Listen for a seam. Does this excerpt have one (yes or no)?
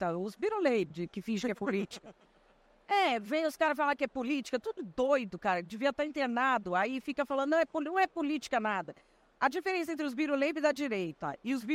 yes